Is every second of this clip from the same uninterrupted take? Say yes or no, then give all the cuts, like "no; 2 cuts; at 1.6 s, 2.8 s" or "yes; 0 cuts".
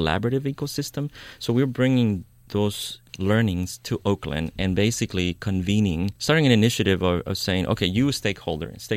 no; 1 cut; at 6.2 s